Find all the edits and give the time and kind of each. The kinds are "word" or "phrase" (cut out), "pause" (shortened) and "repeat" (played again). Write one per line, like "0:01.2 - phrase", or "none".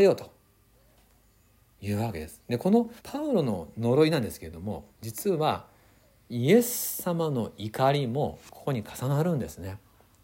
0:03.0 - pause
0:04.9 - pause

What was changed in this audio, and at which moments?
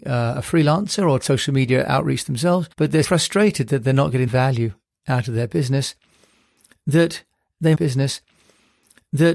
0:01.2 - word
0:02.7 - pause
0:03.0 - word
0:04.3 - word
0:07.7 - repeat

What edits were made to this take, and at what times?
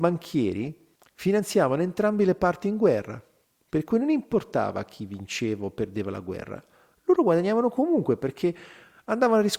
none

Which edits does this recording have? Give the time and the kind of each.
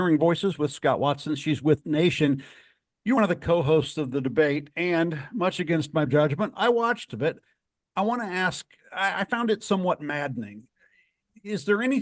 0:01.8 - word
0:03.2 - word
0:06.1 - word
0:07.1 - word

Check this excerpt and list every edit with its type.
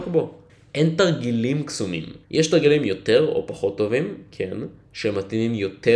0:02.2 - pause

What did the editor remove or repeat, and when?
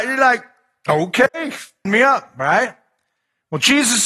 0:01.9 - word

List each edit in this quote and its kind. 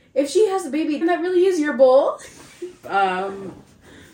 0:01.0 - word
0:02.8 - word

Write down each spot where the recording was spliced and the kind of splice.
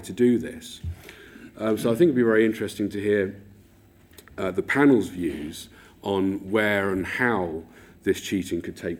none

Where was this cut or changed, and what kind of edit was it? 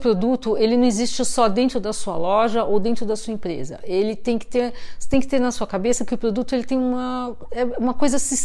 none

